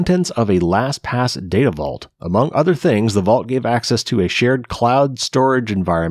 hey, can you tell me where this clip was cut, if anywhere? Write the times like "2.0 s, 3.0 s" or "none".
none